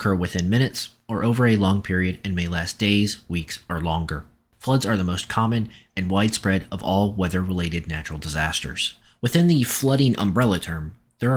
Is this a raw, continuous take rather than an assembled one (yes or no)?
yes